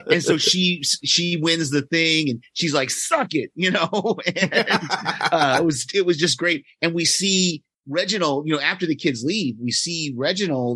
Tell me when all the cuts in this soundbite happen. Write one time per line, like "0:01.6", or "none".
none